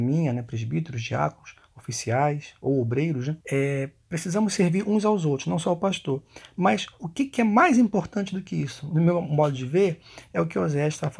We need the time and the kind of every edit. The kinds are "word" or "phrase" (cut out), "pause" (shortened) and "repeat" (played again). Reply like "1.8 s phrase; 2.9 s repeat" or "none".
3.4 s pause